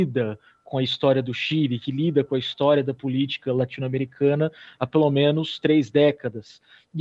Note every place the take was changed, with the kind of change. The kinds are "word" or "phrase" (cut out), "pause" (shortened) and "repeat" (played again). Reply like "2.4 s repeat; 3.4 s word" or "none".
none